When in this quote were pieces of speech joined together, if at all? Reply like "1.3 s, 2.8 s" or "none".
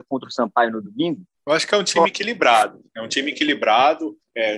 none